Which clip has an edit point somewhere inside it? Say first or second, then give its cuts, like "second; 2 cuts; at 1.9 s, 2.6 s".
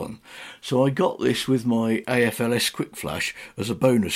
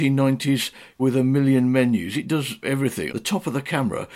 second; 3 cuts; at 1.0 s, 2.6 s, 3.1 s